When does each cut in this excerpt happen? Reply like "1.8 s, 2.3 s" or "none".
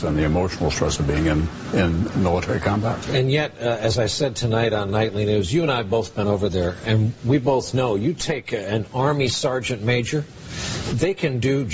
none

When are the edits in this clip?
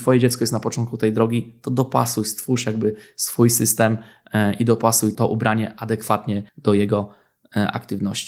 6.5 s

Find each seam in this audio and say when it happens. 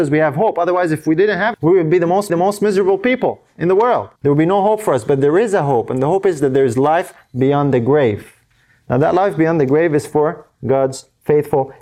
1.5 s, 2.3 s, 4.2 s

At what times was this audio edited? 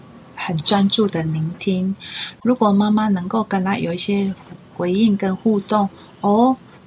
none

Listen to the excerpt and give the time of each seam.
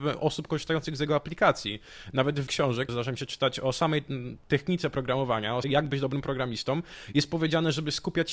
2.5 s, 2.9 s, 5.6 s

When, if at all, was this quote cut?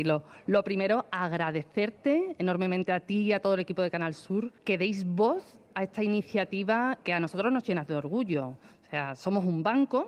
4.6 s, 7.0 s

